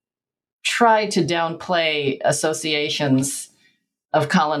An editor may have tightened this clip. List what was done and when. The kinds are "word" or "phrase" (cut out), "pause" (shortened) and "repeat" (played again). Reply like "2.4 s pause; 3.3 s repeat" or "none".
none